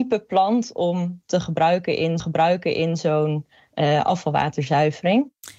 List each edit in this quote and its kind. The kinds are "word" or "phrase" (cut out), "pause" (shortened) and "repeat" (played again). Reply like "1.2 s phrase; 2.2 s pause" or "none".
2.2 s repeat